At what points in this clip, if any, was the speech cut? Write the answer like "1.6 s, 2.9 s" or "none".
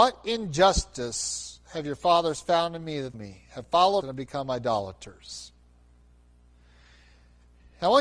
3.1 s, 4.0 s